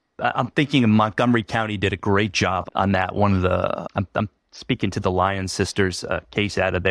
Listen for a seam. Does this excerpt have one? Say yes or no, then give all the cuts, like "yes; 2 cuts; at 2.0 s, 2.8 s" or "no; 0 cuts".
yes; 1 cut; at 2.7 s